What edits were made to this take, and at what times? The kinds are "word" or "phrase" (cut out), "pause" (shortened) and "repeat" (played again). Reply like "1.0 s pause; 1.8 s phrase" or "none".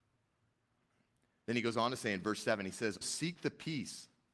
3.0 s word